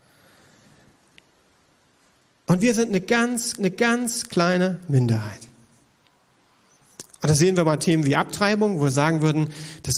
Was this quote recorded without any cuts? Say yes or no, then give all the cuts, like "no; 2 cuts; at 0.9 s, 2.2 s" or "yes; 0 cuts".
no; 1 cut; at 3.6 s